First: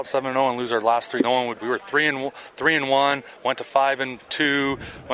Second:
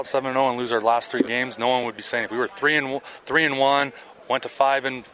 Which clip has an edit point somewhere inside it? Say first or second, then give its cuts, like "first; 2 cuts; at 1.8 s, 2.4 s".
first; 3 cuts; at 1.2 s, 1.6 s, 3.4 s